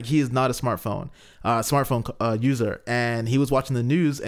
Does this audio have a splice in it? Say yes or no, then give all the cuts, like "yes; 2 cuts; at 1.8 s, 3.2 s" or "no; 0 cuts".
no; 0 cuts